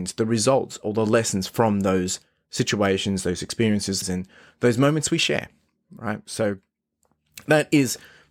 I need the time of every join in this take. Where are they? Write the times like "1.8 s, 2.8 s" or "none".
4.0 s